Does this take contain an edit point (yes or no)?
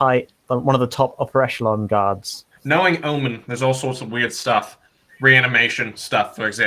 no